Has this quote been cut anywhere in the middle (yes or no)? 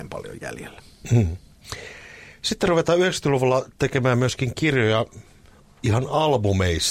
no